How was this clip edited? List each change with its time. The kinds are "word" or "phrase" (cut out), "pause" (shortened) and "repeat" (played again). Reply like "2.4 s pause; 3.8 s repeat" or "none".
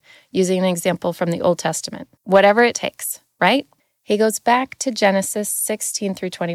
2.2 s pause; 3.8 s pause